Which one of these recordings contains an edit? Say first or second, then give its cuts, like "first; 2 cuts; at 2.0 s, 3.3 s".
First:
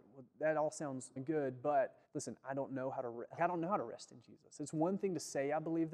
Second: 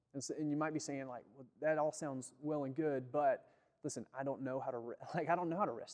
first; 3 cuts; at 1.2 s, 2.1 s, 3.4 s